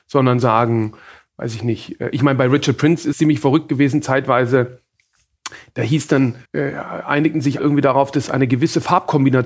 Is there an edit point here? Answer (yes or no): yes